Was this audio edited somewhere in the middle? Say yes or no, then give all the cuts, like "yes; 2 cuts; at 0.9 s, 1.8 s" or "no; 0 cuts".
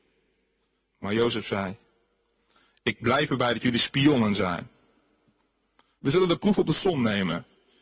no; 0 cuts